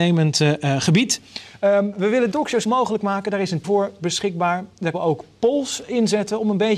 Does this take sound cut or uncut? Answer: cut